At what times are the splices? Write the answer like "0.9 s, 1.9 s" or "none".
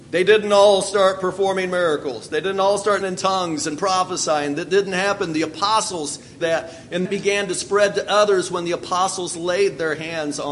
3.0 s, 6.4 s, 7.1 s